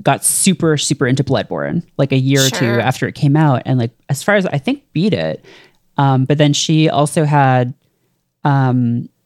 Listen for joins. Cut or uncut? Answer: uncut